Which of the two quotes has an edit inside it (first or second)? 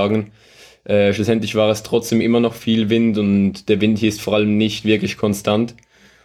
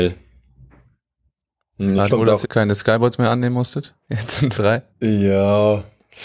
second